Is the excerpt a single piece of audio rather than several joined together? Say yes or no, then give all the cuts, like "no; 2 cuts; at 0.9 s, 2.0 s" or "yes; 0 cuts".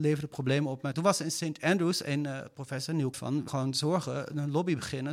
no; 3 cuts; at 0.9 s, 3.1 s, 3.5 s